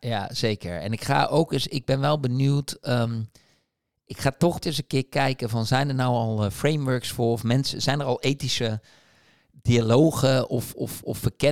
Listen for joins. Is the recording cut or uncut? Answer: cut